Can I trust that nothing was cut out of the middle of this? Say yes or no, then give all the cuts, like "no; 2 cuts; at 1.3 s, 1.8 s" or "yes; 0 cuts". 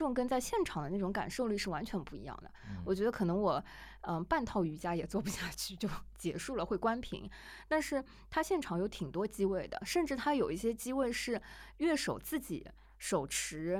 yes; 0 cuts